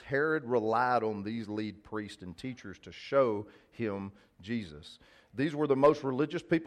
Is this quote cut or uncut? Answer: uncut